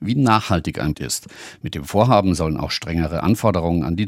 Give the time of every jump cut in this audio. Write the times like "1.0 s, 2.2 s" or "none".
0.9 s